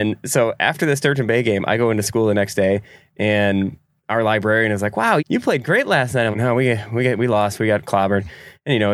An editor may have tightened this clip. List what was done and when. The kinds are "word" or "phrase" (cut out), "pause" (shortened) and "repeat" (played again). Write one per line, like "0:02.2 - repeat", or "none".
0:05.2 - word
0:06.3 - word